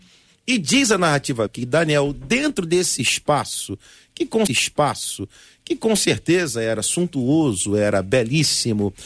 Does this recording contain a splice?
yes; 2 cuts; at 1.5 s, 4.5 s

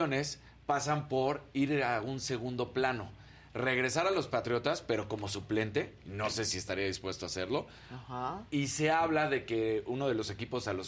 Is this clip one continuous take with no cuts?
no; 1 cut; at 6.0 s

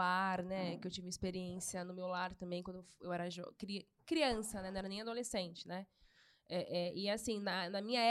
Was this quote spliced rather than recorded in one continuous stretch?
no; 0 cuts

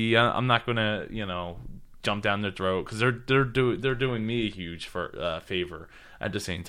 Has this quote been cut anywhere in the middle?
no; 0 cuts

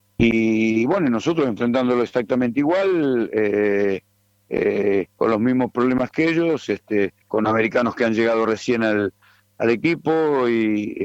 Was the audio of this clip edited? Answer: yes; 2 cuts; at 5.1 s, 7.2 s

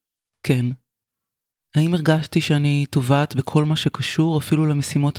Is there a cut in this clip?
no; 0 cuts

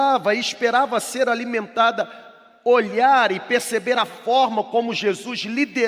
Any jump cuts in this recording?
no; 0 cuts

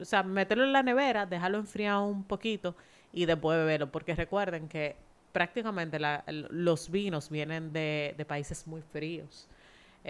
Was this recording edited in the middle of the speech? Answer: no; 0 cuts

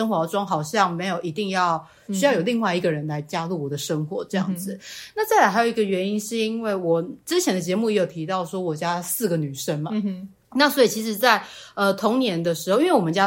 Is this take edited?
no; 0 cuts

